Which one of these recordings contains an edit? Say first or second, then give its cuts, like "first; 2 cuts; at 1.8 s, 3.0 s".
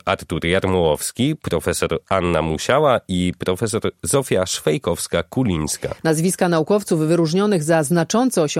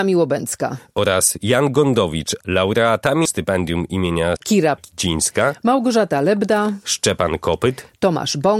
second; 4 cuts; at 2.4 s, 3.3 s, 4.4 s, 4.8 s